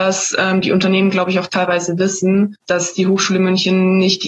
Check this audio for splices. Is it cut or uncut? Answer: cut